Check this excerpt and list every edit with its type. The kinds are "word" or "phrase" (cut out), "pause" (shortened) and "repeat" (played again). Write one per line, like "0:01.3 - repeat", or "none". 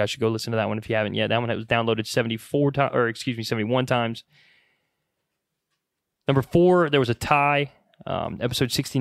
none